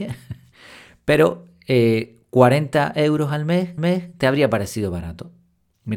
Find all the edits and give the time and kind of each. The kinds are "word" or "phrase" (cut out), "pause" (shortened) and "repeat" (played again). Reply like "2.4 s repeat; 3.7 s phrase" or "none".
3.8 s repeat